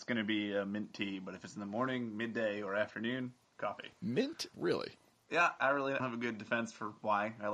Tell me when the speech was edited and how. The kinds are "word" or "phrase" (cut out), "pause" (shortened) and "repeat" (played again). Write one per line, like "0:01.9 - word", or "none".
0:04.5 - word
0:05.6 - word
0:06.0 - word